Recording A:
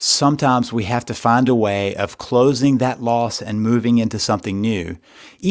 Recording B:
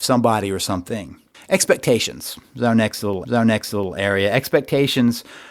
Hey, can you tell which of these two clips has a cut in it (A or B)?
B